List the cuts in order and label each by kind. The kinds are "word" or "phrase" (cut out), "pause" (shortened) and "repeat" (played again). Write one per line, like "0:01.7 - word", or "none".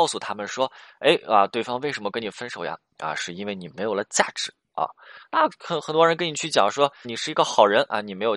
0:07.0 - word